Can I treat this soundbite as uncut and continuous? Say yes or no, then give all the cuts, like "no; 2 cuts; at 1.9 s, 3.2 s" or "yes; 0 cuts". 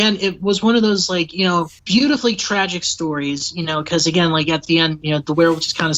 no; 1 cut; at 1.8 s